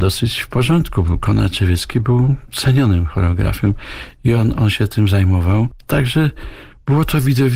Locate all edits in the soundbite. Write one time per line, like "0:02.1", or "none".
none